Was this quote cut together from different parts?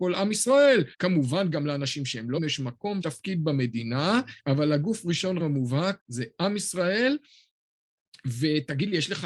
yes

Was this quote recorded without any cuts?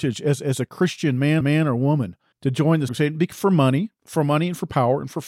no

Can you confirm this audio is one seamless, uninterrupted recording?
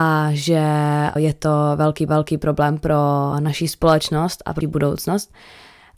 no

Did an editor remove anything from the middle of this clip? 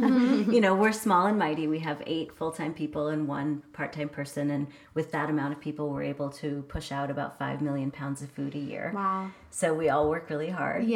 yes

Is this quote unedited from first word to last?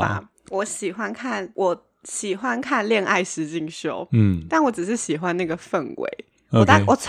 yes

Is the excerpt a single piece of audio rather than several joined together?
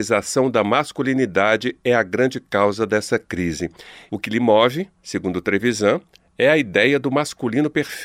yes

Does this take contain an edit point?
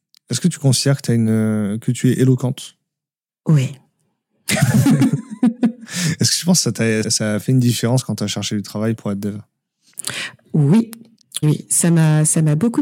yes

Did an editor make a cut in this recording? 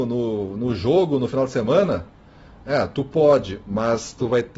no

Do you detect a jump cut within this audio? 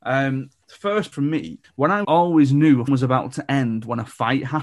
yes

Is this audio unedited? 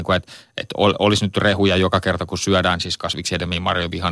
yes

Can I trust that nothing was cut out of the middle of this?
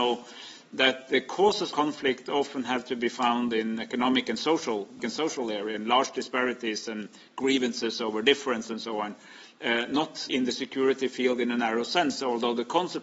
no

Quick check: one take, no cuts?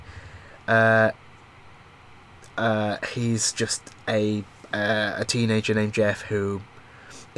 yes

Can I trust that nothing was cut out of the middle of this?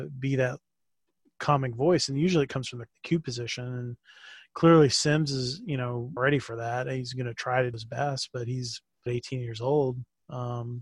no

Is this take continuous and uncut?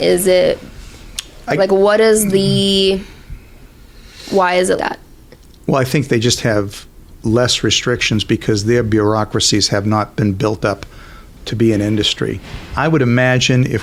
no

